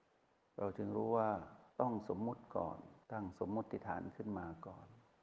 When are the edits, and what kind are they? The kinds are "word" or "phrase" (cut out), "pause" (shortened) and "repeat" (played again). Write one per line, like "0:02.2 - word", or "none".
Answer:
0:01.7 - pause
0:03.0 - pause